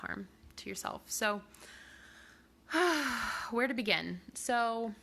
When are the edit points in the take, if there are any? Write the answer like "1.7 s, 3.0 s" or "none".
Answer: none